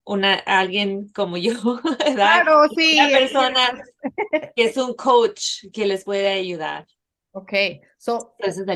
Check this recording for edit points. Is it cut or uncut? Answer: uncut